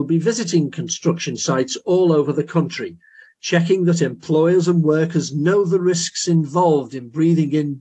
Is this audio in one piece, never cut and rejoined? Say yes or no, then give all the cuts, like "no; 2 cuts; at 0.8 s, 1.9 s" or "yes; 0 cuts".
yes; 0 cuts